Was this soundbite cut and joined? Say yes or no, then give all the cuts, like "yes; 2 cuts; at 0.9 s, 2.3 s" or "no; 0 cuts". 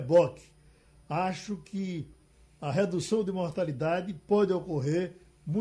no; 0 cuts